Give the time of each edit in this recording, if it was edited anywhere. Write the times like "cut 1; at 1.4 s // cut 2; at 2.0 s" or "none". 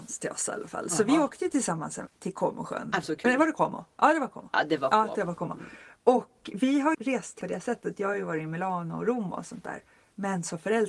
cut 1; at 2.1 s // cut 2; at 3.0 s // cut 3; at 6.9 s // cut 4; at 7.4 s